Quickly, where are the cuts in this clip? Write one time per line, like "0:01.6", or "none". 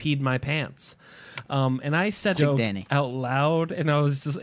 0:02.4